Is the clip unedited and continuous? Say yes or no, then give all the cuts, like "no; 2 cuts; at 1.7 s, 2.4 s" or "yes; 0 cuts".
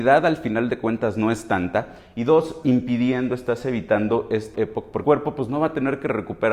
no; 3 cuts; at 2.6 s, 4.5 s, 5.0 s